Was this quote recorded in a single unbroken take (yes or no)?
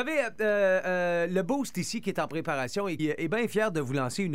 no